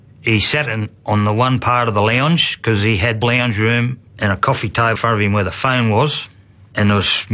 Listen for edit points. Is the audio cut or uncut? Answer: cut